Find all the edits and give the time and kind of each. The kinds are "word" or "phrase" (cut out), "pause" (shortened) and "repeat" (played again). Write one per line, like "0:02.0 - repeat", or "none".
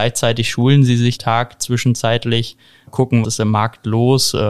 0:01.2 - phrase
0:02.9 - word
0:03.2 - word